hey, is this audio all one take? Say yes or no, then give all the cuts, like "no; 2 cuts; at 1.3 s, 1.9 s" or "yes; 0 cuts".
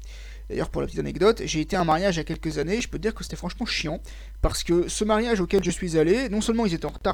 yes; 0 cuts